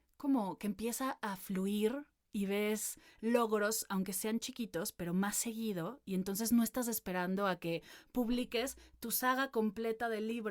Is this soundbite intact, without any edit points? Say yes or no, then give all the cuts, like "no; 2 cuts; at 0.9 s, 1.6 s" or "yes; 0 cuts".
yes; 0 cuts